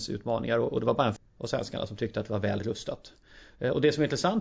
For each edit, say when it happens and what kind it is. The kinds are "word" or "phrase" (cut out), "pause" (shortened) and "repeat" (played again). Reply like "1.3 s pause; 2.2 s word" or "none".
1.2 s word